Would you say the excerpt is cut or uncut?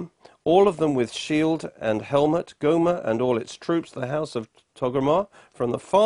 uncut